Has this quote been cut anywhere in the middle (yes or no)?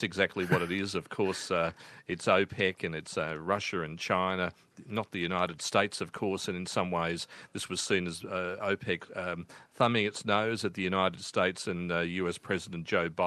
no